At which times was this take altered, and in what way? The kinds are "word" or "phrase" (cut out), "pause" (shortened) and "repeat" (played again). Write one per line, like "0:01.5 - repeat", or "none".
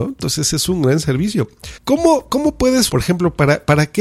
0:01.8 - pause
0:02.9 - word